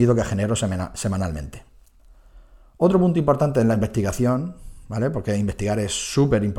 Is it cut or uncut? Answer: uncut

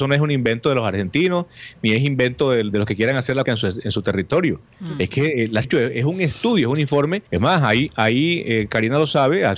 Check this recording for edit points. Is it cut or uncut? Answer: cut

